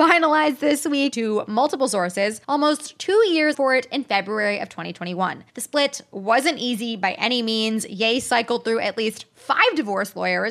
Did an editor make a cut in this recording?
yes; 4 cuts; at 1.1 s, 2.4 s, 3.5 s, 5.5 s

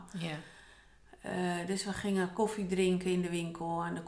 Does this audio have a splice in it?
no; 0 cuts

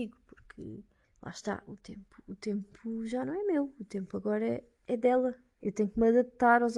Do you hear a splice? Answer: yes; 1 cut; at 1.0 s

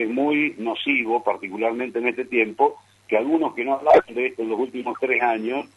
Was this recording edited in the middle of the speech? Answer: no; 0 cuts

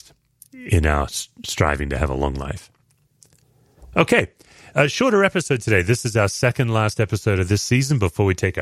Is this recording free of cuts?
yes; 0 cuts

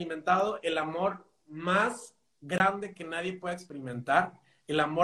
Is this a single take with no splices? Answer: yes; 0 cuts

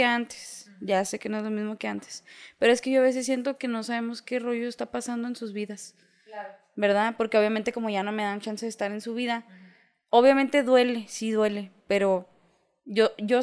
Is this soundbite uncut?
yes; 0 cuts

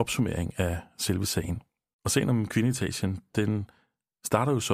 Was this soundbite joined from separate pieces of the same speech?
no; 0 cuts

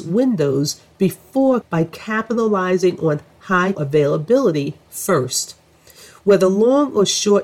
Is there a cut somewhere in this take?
yes; 2 cuts; at 1.6 s, 3.7 s

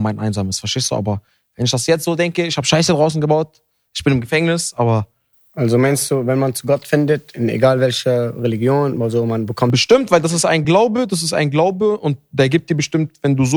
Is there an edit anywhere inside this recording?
no; 0 cuts

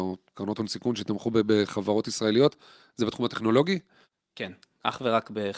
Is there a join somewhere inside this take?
no; 0 cuts

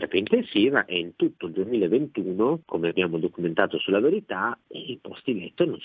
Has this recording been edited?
yes; 1 cut; at 2.6 s

